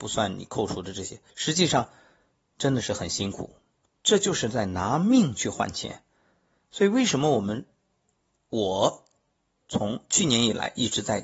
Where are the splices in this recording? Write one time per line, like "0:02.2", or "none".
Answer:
0:01.3